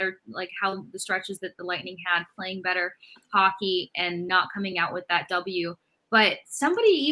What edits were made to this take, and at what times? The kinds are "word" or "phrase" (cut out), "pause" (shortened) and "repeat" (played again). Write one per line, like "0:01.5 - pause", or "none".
none